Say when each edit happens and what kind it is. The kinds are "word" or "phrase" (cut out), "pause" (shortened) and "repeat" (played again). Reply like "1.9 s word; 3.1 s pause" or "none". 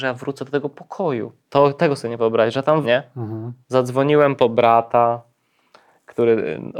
1.4 s pause; 2.2 s word; 2.8 s word; 3.6 s pause

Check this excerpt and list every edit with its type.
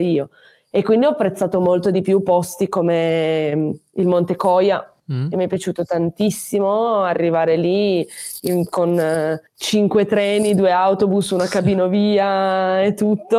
5.0 s pause; 9.5 s pause

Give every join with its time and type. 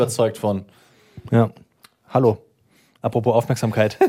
none

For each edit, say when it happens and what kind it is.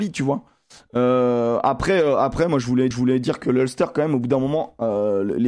2.9 s repeat

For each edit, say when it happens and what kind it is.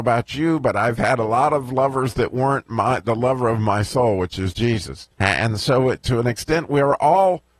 5.1 s pause

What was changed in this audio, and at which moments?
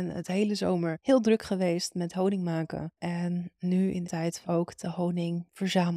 4.0 s word; 4.4 s phrase

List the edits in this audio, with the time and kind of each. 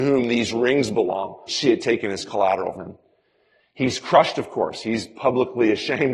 1.5 s word; 2.7 s word

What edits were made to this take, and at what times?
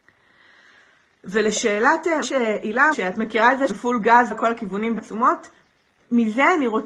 2.2 s word; 2.9 s word; 3.7 s word; 4.3 s word; 5.0 s word

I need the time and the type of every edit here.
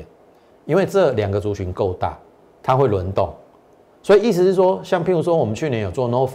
none

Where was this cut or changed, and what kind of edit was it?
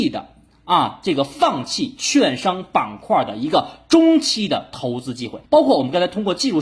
5.4 s pause

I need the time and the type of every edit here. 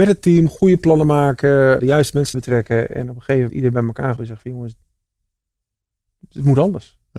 1.8 s word; 2.3 s word; 3.5 s word; 4.2 s word

